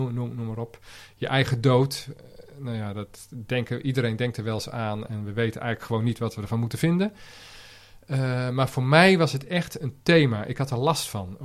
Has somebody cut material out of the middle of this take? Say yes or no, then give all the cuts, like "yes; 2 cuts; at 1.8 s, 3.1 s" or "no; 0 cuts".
no; 0 cuts